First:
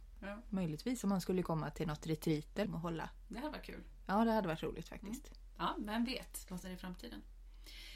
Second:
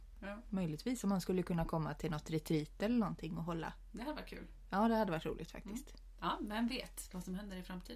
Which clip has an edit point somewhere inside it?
first; 3 cuts; at 1.4 s, 2.7 s, 6.6 s

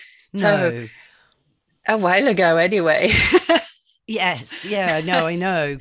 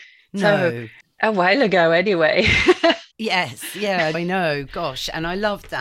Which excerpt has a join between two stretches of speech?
second; 3 cuts; at 1.0 s, 3.1 s, 4.1 s

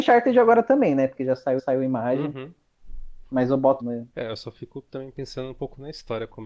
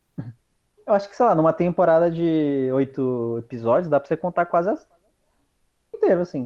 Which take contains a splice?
first; 3 cuts; at 1.6 s, 3.8 s, 4.1 s

